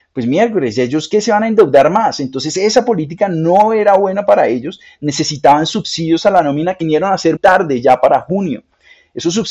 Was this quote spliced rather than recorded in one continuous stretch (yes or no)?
yes